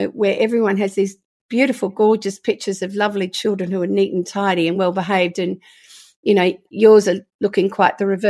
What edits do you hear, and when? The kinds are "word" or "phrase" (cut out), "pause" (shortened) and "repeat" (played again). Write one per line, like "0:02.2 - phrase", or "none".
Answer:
none